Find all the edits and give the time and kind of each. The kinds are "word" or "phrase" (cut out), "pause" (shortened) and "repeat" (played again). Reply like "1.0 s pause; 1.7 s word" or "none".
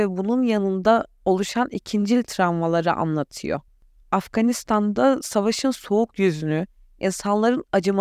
none